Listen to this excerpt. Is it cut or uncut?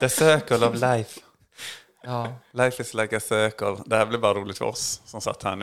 uncut